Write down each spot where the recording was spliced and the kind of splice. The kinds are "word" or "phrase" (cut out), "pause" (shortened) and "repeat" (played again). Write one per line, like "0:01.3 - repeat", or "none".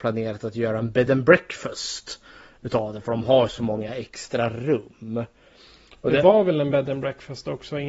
none